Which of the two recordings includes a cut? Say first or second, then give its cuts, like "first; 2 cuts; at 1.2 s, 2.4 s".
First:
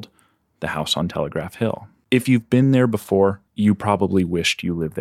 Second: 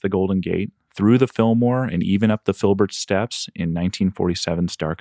first; 1 cut; at 3.5 s